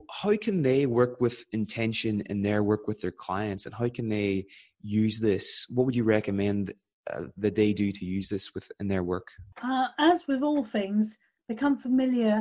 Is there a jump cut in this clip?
yes; 1 cut; at 9.5 s

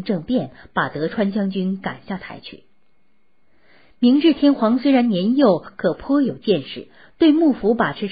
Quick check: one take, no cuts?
yes; 0 cuts

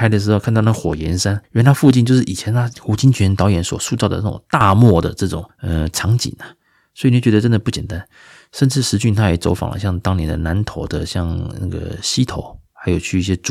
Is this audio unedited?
yes; 0 cuts

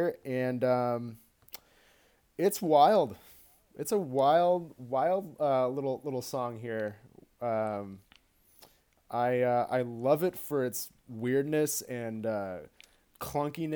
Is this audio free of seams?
yes; 0 cuts

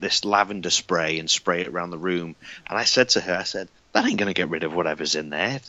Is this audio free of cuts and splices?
no; 1 cut; at 3.8 s

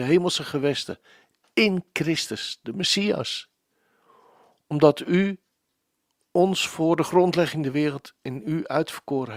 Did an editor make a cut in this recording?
no; 0 cuts

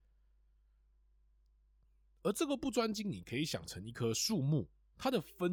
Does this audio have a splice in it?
no; 0 cuts

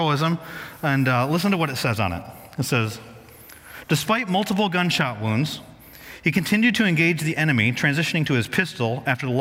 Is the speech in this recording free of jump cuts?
yes; 0 cuts

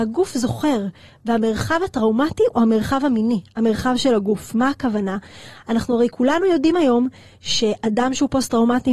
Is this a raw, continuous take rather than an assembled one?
yes; 0 cuts

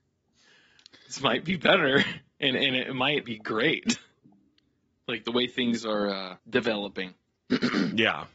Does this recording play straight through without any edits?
no; 3 cuts; at 3.2 s, 4.2 s, 6.4 s

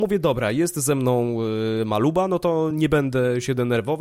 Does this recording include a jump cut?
no; 0 cuts

